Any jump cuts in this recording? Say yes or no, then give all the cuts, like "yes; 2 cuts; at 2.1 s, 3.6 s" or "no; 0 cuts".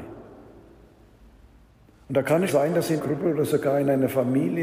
yes; 2 cuts; at 2.5 s, 3.0 s